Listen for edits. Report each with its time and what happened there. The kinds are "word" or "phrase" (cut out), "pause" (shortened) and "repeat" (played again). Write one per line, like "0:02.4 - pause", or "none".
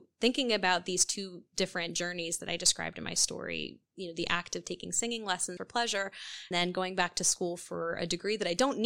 0:03.9 - pause
0:05.6 - word
0:06.5 - word